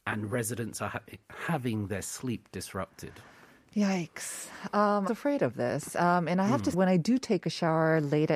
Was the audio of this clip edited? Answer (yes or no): yes